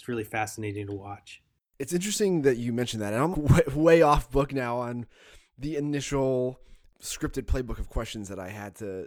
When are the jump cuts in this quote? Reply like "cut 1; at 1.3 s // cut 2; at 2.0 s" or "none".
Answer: cut 1; at 3.3 s